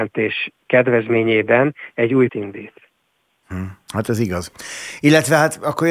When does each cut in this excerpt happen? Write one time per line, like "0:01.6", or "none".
0:02.3